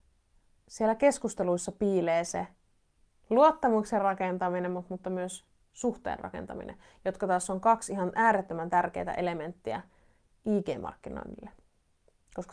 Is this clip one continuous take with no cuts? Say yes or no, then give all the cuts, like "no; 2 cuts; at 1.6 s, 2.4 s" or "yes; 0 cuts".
yes; 0 cuts